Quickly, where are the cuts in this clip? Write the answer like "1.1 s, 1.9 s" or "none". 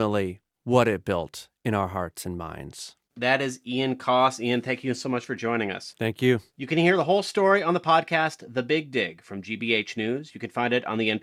3.0 s, 6.5 s